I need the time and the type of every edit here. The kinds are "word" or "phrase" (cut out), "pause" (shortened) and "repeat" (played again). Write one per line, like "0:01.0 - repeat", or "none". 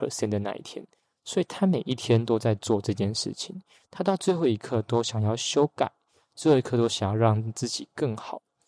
none